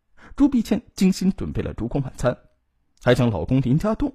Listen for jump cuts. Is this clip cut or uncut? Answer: uncut